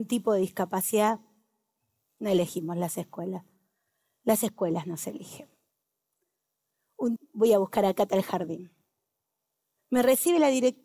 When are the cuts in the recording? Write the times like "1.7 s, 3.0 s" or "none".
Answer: 7.2 s